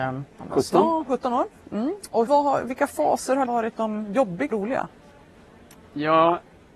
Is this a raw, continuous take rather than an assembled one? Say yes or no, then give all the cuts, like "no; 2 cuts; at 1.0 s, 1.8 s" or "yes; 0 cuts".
no; 3 cuts; at 2.3 s, 3.5 s, 4.5 s